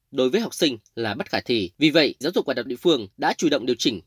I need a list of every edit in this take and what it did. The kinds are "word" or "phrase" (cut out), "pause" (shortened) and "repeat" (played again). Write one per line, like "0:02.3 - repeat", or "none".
0:01.7 - pause
0:02.2 - word
0:02.7 - word
0:03.1 - pause